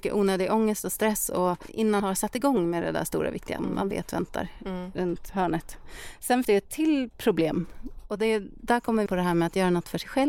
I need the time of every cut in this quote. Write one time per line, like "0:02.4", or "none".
0:02.0
0:03.6
0:06.4
0:09.1